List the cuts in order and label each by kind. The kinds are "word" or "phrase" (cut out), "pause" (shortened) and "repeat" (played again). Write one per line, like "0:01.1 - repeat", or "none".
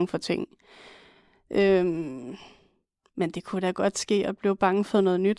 none